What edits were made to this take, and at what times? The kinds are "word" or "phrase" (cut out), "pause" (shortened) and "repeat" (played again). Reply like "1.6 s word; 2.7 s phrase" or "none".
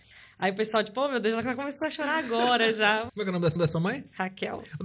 3.1 s word; 3.6 s repeat

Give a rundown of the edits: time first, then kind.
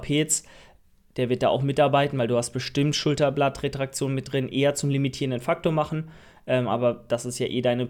none

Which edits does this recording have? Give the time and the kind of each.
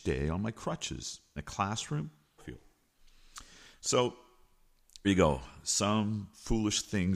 1.4 s word; 2.4 s phrase; 5.0 s word

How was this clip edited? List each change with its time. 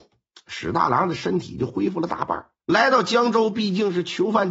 2.6 s pause

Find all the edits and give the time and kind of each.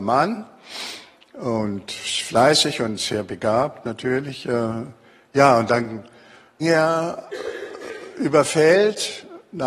6.6 s word

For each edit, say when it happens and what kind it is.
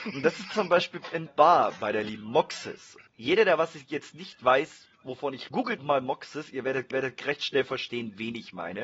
1.3 s word; 3.1 s pause; 4.9 s pause; 5.5 s word; 5.8 s word; 6.9 s repeat

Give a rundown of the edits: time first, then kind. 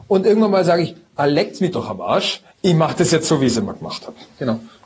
2.5 s pause

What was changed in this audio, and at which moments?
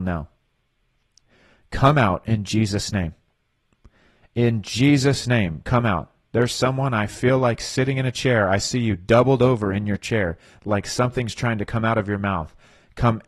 none

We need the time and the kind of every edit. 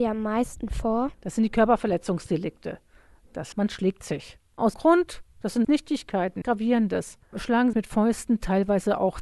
3.5 s word; 4.7 s word; 5.6 s word; 6.4 s word; 7.7 s word

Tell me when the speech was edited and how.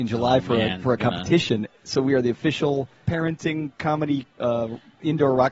1.0 s word; 4.3 s pause

